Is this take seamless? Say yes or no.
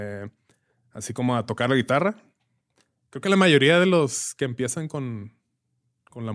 yes